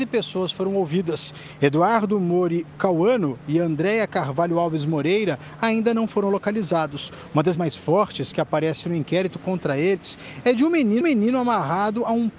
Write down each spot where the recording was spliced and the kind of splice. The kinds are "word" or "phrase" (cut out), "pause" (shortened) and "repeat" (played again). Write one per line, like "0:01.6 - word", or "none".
0:07.5 - word
0:11.0 - repeat